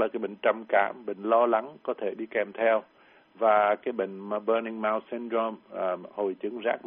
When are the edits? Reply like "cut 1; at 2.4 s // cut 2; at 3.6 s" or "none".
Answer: none